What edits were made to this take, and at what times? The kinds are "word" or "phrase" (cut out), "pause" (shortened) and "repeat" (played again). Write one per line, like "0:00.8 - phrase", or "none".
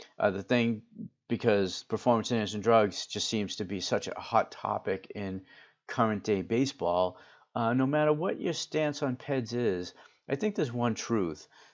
none